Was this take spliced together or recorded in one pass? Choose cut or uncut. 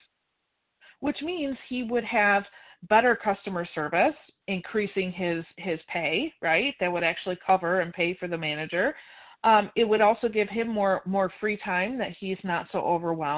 uncut